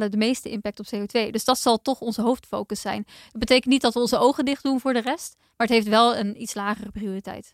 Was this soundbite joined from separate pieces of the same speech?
no; 0 cuts

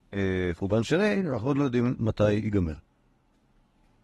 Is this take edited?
no; 0 cuts

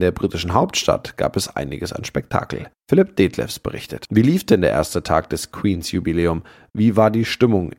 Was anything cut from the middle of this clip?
no; 0 cuts

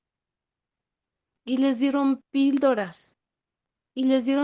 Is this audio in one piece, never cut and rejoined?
yes; 0 cuts

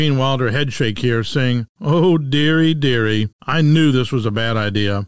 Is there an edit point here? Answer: yes; 2 cuts; at 1.7 s, 3.3 s

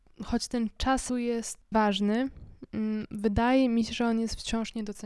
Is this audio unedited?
no; 2 cuts; at 1.1 s, 1.7 s

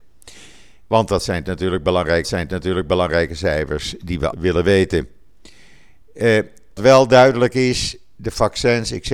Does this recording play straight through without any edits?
no; 3 cuts; at 2.2 s, 4.3 s, 6.8 s

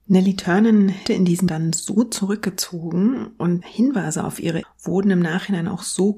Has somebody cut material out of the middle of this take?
yes; 4 cuts; at 1.1 s, 1.5 s, 3.6 s, 4.6 s

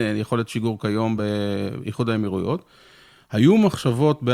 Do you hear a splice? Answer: no; 0 cuts

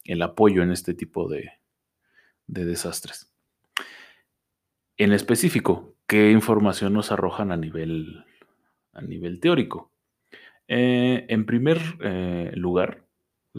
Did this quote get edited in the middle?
no; 0 cuts

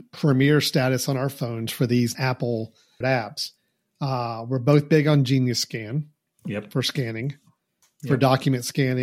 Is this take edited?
yes; 2 cuts; at 2.1 s, 3.0 s

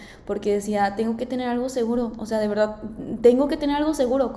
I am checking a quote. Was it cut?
no; 0 cuts

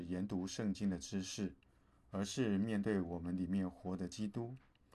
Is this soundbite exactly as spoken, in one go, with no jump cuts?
yes; 0 cuts

